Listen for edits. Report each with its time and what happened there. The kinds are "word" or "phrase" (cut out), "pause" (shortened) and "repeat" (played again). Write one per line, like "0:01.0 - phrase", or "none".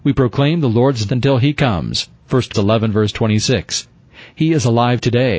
0:01.1 - word
0:02.5 - word